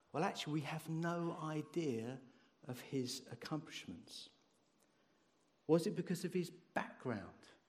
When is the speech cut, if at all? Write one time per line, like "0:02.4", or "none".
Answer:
none